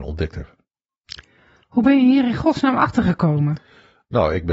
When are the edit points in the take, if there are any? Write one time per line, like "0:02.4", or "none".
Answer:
none